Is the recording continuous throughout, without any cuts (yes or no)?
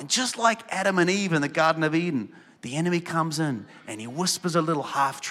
yes